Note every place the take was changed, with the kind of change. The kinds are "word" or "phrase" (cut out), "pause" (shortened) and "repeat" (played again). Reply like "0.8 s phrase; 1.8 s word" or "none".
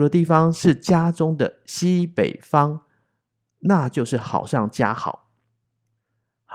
none